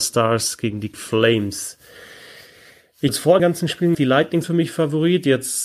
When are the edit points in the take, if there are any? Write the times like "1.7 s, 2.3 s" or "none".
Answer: 0.9 s, 3.1 s, 3.4 s, 3.9 s, 4.4 s